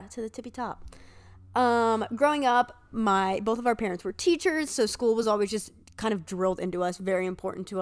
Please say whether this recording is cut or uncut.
uncut